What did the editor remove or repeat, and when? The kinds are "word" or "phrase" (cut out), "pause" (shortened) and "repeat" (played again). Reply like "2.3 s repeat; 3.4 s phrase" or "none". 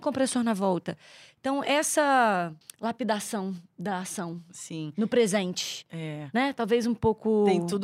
2.6 s pause